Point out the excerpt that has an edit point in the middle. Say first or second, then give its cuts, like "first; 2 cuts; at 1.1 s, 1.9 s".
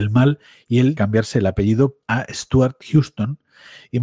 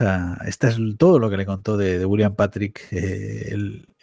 first; 3 cuts; at 1.0 s, 2.0 s, 2.8 s